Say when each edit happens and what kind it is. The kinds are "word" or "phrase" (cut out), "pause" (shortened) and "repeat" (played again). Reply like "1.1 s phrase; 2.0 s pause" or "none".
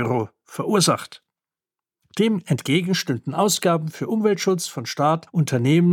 none